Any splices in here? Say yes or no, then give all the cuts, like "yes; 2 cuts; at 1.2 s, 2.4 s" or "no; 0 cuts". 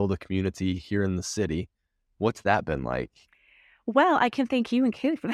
no; 0 cuts